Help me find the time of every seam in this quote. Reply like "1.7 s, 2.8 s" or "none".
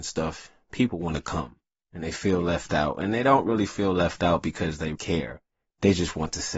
1.7 s, 4.9 s